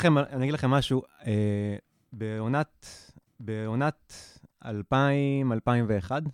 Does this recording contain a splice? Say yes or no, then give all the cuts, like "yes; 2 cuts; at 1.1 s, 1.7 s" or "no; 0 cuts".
yes; 1 cut; at 3.3 s